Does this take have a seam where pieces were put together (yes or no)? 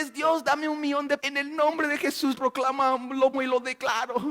yes